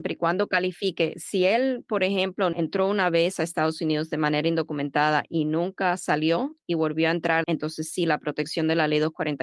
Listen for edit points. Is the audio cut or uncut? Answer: cut